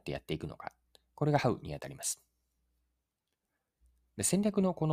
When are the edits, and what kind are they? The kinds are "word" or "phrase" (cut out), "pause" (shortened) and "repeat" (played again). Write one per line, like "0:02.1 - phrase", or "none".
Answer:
none